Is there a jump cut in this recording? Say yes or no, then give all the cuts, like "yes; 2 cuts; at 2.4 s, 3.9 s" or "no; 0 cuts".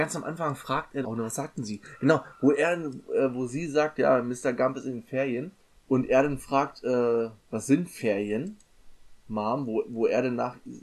yes; 4 cuts; at 1.0 s, 5.6 s, 7.4 s, 9.2 s